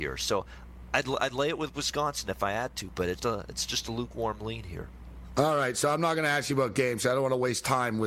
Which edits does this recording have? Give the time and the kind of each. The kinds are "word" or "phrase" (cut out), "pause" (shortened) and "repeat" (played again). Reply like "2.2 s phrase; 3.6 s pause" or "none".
3.2 s word